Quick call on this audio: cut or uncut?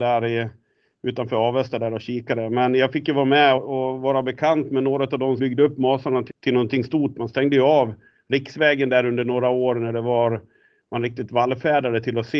cut